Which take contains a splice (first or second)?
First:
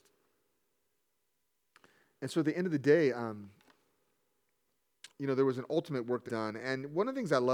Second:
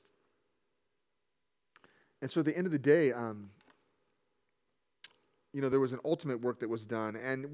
first